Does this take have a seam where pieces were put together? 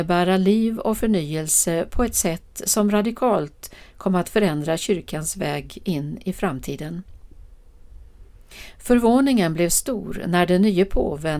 no; 0 cuts

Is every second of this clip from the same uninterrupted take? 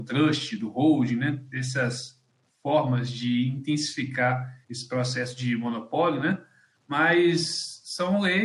no; 1 cut; at 4.6 s

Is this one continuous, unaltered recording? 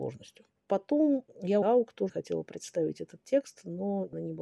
no; 2 cuts; at 1.6 s, 2.1 s

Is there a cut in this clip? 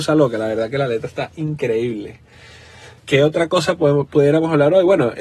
no; 0 cuts

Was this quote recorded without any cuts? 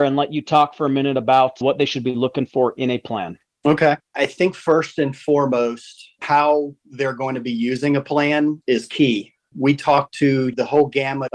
yes; 0 cuts

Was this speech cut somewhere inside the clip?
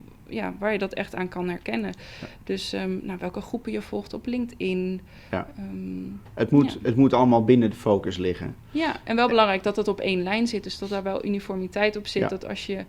no; 0 cuts

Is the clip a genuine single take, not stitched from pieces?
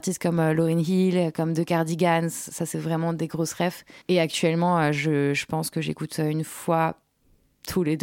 no; 1 cut; at 4.0 s

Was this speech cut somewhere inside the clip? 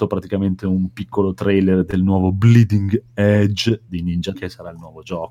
yes; 1 cut; at 4.3 s

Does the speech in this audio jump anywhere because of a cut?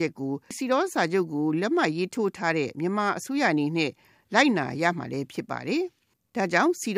no; 0 cuts

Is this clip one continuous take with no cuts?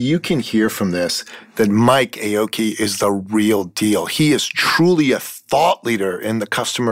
yes; 0 cuts

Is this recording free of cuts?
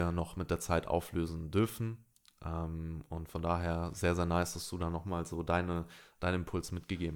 yes; 0 cuts

